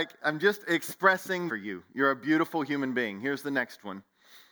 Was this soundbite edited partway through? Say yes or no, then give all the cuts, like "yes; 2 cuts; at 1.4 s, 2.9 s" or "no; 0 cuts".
yes; 1 cut; at 1.5 s